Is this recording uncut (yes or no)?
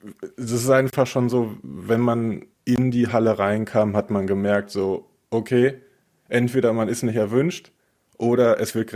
no